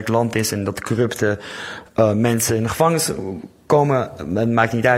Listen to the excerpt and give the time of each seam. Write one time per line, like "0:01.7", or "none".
none